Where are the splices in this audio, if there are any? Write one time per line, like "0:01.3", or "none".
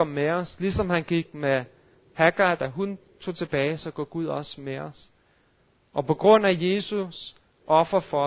none

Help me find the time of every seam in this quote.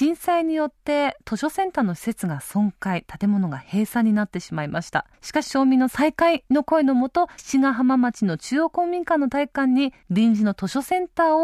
0:05.1
0:10.0

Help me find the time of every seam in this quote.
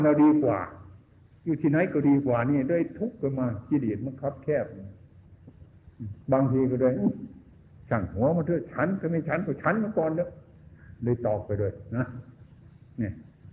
0:06.2

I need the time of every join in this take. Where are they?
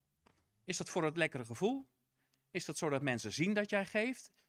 none

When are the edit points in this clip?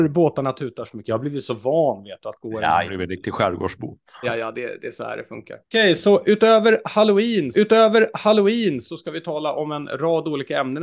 0:02.9
0:04.2
0:05.6
0:07.5

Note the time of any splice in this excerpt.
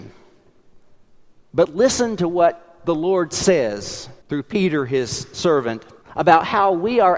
0:04.2
0:06.0

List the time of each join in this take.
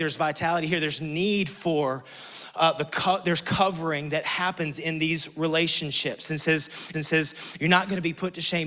0:06.9

